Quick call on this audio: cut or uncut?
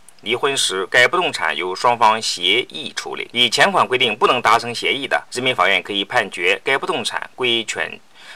cut